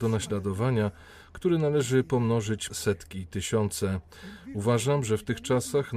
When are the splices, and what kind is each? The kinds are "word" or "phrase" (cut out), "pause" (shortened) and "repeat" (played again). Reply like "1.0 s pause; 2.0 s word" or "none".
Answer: 2.7 s word